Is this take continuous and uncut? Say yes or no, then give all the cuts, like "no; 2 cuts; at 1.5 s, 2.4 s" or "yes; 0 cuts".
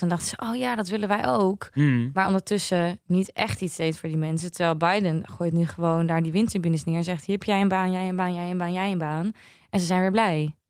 yes; 0 cuts